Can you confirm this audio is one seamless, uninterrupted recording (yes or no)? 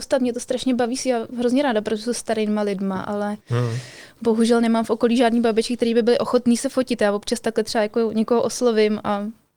no